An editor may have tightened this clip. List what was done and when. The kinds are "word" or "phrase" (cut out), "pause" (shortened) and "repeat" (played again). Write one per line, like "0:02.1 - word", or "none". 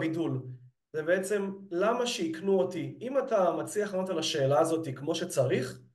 none